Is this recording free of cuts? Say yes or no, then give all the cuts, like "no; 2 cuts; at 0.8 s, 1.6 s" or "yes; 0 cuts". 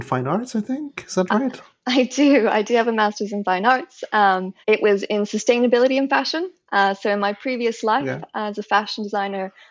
no; 1 cut; at 4.6 s